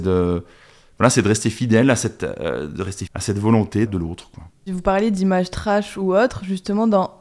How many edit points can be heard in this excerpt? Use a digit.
2